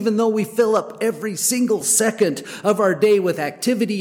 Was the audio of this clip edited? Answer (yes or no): no